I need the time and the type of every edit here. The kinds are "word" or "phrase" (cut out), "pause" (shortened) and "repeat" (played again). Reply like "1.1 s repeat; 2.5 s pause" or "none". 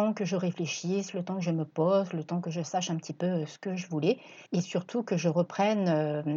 4.5 s pause